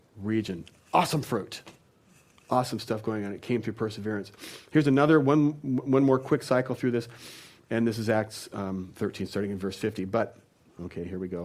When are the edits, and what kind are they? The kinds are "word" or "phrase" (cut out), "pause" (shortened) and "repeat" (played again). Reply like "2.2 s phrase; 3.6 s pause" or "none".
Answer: none